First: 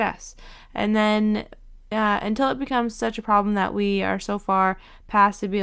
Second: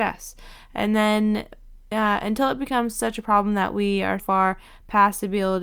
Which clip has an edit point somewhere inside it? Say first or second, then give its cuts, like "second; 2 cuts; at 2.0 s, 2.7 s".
second; 1 cut; at 4.2 s